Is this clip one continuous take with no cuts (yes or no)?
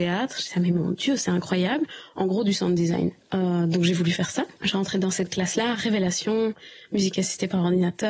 no